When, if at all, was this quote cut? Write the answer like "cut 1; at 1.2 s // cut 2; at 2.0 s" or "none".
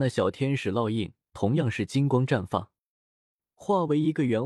none